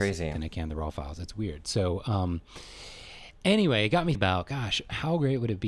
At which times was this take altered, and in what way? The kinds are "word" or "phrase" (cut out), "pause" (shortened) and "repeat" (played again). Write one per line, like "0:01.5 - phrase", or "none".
0:04.1 - word